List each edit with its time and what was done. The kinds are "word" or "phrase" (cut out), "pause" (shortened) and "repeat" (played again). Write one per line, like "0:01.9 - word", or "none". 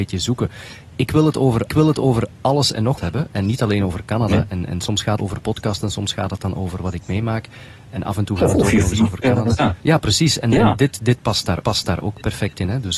0:01.7 - repeat
0:03.0 - word
0:05.2 - phrase
0:09.8 - pause
0:11.6 - repeat

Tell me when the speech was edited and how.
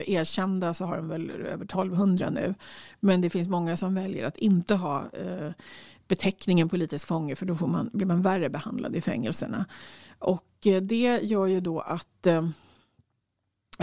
none

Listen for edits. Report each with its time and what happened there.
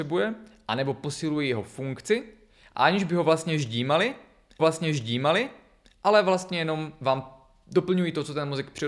0:04.6 - repeat

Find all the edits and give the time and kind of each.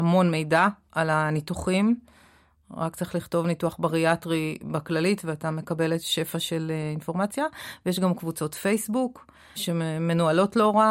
0:09.6 - word

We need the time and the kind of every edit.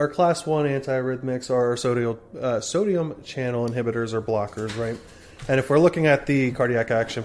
none

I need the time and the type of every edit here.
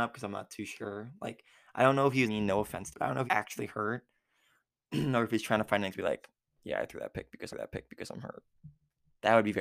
0:02.3 - phrase
0:02.9 - phrase
0:03.3 - word
0:05.9 - word
0:07.5 - repeat

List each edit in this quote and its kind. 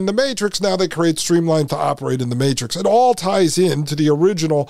0:01.7 - word

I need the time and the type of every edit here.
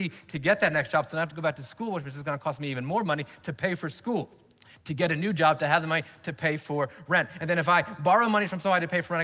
none

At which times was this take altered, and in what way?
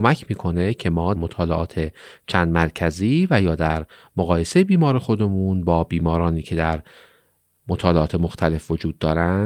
0:01.2 - word

